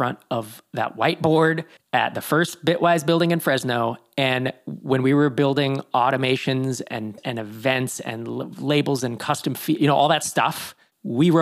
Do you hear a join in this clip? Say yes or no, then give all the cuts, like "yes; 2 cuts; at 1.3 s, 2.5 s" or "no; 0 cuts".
yes; 2 cuts; at 1.8 s, 7.2 s